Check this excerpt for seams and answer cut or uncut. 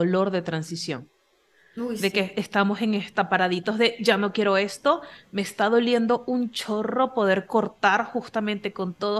uncut